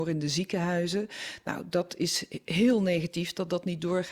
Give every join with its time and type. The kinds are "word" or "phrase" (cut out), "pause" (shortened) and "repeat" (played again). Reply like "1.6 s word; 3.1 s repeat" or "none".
none